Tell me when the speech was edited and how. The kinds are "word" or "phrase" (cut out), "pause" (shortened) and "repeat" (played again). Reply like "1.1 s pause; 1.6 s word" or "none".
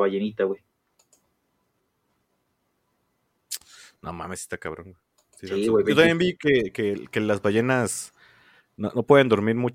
none